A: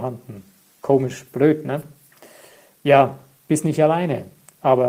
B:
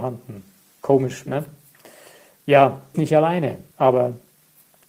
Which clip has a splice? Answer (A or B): B